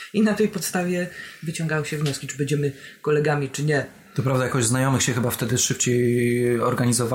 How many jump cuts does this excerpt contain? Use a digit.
0